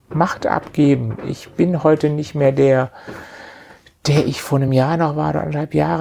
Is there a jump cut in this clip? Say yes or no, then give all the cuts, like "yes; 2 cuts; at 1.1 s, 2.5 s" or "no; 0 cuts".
no; 0 cuts